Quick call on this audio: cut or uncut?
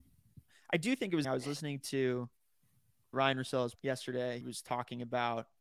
cut